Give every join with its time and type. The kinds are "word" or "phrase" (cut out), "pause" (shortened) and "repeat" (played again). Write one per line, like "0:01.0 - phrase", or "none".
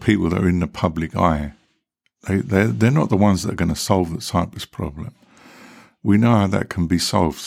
none